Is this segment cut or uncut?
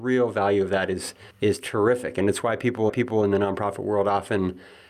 cut